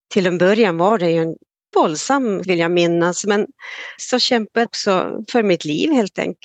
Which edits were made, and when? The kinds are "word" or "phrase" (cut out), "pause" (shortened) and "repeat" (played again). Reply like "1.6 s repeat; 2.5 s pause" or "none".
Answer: 1.7 s word; 2.4 s word; 4.0 s word; 4.7 s word